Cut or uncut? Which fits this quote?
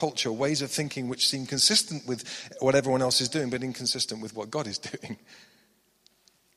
uncut